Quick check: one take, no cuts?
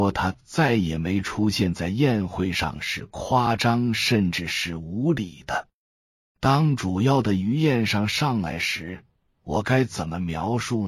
yes; 0 cuts

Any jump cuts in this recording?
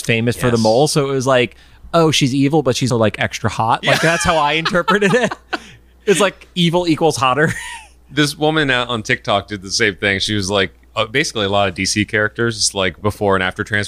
yes; 1 cut; at 2.9 s

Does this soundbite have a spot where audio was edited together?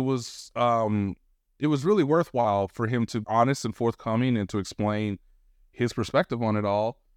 yes; 1 cut; at 3.2 s

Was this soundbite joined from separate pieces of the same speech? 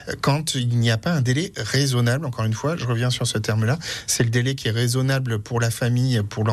no; 0 cuts

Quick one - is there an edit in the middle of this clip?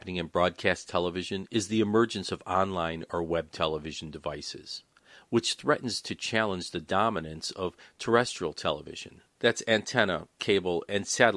no; 0 cuts

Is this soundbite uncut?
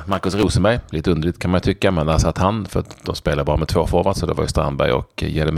yes; 0 cuts

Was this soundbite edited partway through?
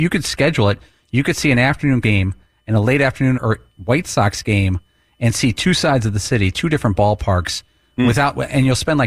yes; 3 cuts; at 2.0 s, 3.3 s, 3.7 s

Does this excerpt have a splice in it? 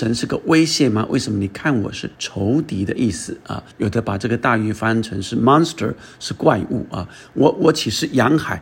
yes; 2 cuts; at 2.1 s, 3.7 s

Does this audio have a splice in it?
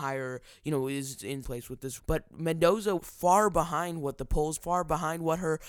yes; 4 cuts; at 1.4 s, 2.0 s, 3.0 s, 4.6 s

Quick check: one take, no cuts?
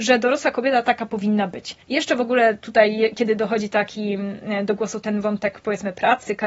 no; 1 cut; at 1.8 s

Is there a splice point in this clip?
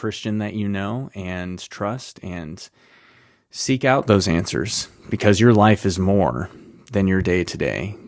no; 0 cuts

